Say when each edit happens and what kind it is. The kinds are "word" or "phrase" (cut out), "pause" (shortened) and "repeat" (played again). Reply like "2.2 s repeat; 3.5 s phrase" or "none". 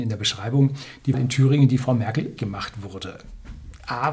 1.1 s word; 1.8 s word; 2.4 s word